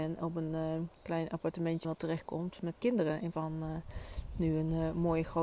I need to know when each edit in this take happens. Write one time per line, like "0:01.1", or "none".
0:01.0
0:01.8
0:02.8
0:03.3

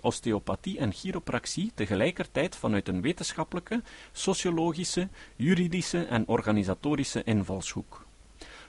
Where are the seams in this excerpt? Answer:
none

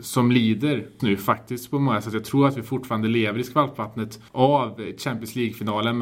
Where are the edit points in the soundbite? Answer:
0:01.0
0:04.3

